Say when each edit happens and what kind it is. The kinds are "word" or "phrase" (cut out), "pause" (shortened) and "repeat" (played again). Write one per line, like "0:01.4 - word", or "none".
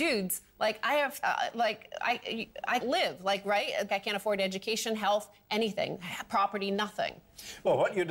0:01.2 - word
0:02.8 - word
0:03.9 - word